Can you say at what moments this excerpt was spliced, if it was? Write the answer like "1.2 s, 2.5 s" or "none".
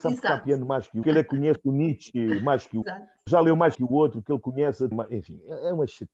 1.0 s, 2.8 s, 3.3 s, 3.7 s, 4.9 s